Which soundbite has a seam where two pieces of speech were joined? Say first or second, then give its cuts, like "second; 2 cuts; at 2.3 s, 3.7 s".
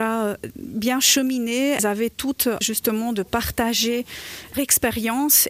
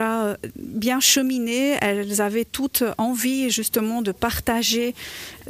first; 3 cuts; at 1.8 s, 2.6 s, 4.5 s